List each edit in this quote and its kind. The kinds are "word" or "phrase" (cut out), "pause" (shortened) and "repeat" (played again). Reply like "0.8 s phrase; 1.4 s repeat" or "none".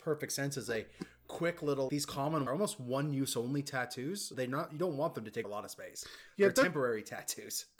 1.9 s word; 2.5 s phrase; 4.3 s word; 5.4 s word

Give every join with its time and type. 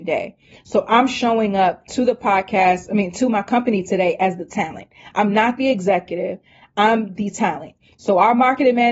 none

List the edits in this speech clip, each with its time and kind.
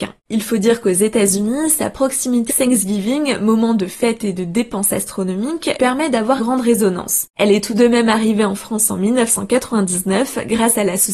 2.5 s word; 5.8 s word; 6.4 s word

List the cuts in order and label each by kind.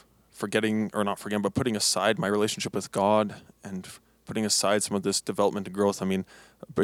none

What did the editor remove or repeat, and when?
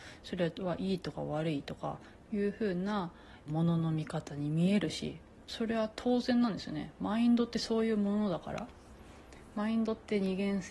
3.5 s phrase

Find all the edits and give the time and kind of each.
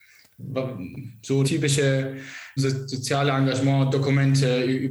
1.4 s word; 2.6 s word; 3.9 s word

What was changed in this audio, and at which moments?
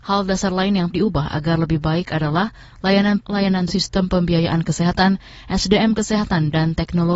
0.9 s word; 3.2 s word; 3.7 s word

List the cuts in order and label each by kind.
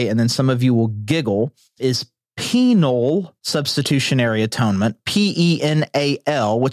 1.8 s word; 3.4 s pause

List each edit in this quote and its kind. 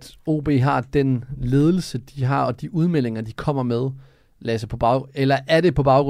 none

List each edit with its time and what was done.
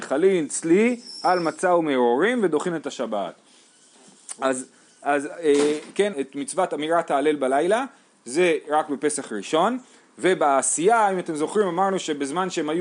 6.1 s phrase

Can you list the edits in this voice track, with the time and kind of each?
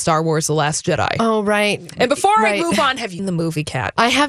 3.2 s word

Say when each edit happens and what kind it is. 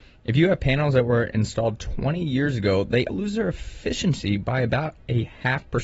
3.1 s word

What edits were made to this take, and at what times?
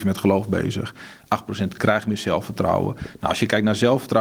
none

